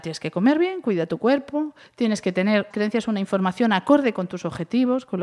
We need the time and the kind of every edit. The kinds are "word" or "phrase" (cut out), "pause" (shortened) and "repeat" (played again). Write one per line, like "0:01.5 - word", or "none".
0:02.7 - word